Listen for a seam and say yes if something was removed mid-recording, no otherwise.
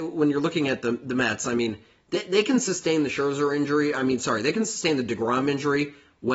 no